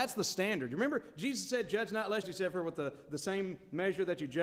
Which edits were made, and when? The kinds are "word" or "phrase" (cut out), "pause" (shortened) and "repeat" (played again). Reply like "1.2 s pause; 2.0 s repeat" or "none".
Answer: 2.2 s phrase